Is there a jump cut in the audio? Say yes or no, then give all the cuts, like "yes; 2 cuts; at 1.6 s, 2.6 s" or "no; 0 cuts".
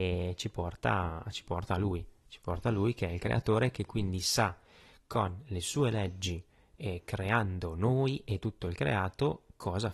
no; 0 cuts